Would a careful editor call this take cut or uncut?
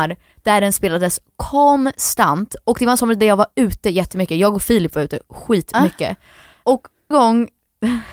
cut